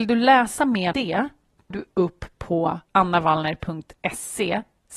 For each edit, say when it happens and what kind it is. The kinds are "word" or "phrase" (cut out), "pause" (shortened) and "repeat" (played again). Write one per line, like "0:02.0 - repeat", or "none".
0:00.9 - word
0:01.7 - word
0:02.8 - pause

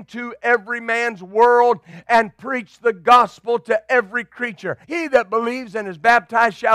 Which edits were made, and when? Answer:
0:04.8 - pause

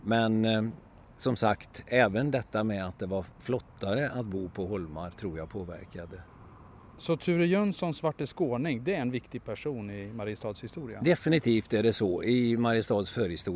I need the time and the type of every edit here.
none

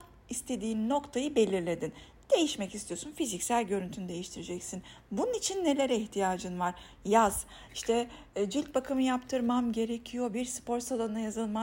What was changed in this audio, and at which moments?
none

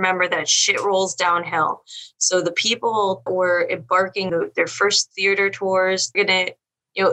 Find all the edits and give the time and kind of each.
0:03.3 - word
0:04.3 - word
0:06.1 - word

